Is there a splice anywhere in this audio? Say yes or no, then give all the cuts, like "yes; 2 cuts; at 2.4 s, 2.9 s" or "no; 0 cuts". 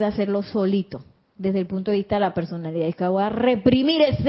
no; 0 cuts